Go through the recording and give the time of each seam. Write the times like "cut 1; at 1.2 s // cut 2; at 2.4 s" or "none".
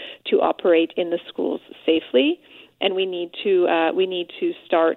none